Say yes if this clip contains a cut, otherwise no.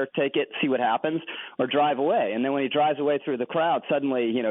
no